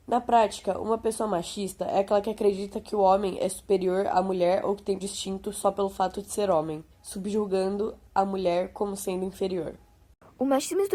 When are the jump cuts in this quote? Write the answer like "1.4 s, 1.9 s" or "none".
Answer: 5.0 s, 6.9 s